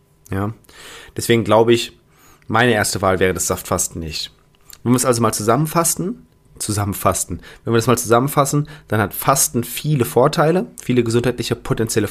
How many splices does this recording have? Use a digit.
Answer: 0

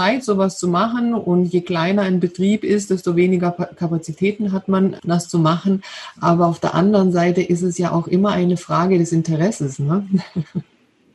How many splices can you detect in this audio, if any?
1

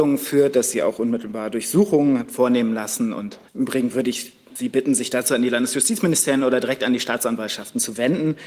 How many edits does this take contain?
1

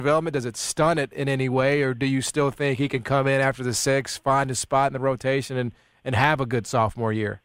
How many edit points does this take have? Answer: 0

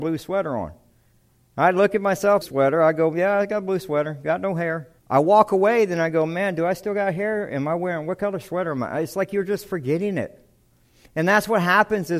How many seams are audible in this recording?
2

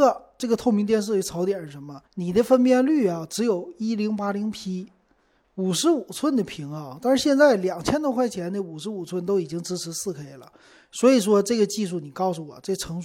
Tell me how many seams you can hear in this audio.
1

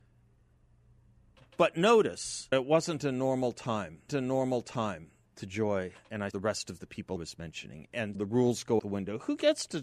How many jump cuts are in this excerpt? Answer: 6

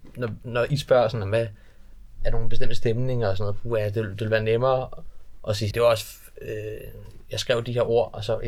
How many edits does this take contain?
1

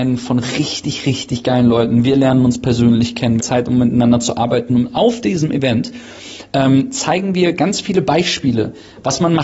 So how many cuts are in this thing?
1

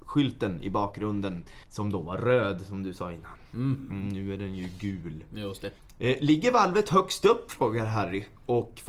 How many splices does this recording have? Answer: 2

